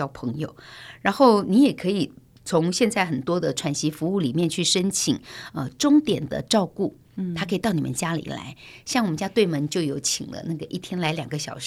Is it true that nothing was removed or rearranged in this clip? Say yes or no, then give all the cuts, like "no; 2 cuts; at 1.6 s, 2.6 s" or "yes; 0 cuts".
yes; 0 cuts